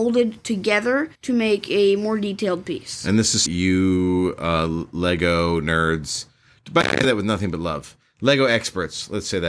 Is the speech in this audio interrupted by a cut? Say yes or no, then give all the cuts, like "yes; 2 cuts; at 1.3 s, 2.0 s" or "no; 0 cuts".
yes; 2 cuts; at 1.1 s, 3.5 s